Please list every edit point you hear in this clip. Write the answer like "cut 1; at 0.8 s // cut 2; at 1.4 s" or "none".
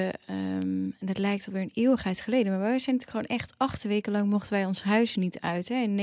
none

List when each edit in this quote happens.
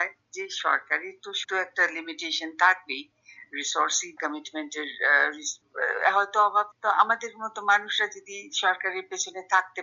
cut 1; at 1.4 s // cut 2; at 4.2 s // cut 3; at 6.7 s

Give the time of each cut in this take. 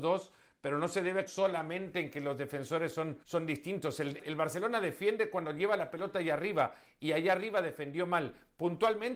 cut 1; at 1.3 s // cut 2; at 3.2 s // cut 3; at 4.2 s

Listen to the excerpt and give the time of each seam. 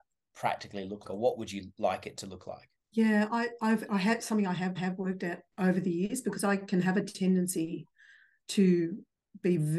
cut 1; at 1.0 s // cut 2; at 2.8 s // cut 3; at 4.7 s

